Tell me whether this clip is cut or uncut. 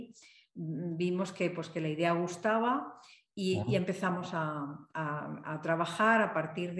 uncut